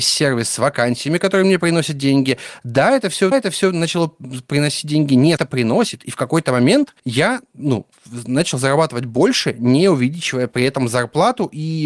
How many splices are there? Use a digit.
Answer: 3